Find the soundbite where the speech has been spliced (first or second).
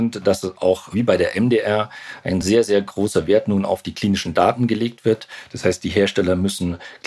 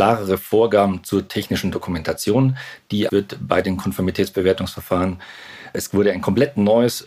second